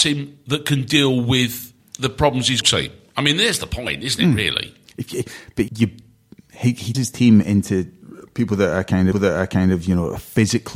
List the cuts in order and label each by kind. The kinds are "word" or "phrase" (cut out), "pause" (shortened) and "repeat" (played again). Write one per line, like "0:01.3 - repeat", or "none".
0:01.8 - pause
0:02.6 - phrase
0:05.7 - word
0:06.9 - word
0:09.1 - repeat

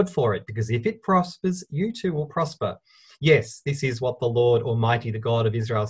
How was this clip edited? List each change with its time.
none

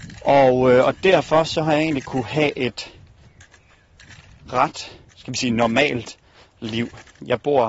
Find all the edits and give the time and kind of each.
0:05.1 - pause

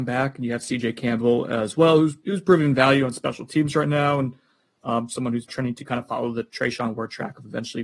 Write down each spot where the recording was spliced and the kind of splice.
0:05.5 - word

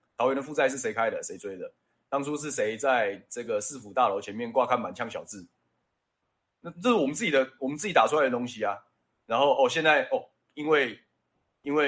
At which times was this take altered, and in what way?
none

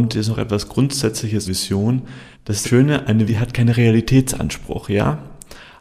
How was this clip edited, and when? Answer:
0:01.4 - phrase
0:02.3 - pause
0:02.6 - word
0:03.3 - word

